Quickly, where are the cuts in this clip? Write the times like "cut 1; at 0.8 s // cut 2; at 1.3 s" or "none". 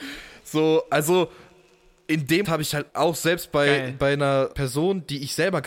cut 1; at 2.4 s // cut 2; at 2.9 s // cut 3; at 4.5 s